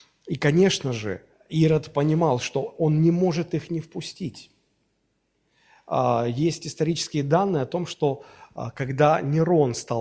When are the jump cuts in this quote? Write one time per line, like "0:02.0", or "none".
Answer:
0:01.3

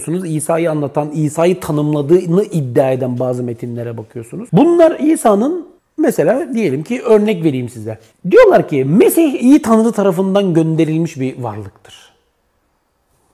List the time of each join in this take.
0:05.8
0:08.1

